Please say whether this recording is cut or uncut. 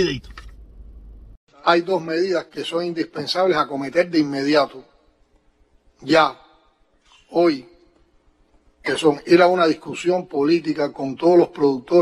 uncut